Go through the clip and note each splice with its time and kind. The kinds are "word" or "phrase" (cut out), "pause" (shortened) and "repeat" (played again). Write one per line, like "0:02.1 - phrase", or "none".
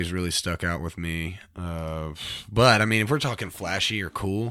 none